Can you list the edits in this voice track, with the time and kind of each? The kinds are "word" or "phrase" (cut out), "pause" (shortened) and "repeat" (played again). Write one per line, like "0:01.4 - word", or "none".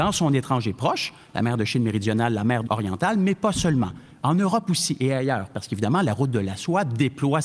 0:02.7 - word